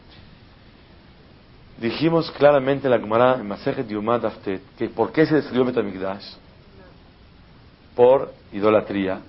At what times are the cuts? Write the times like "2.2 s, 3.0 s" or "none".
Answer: 4.7 s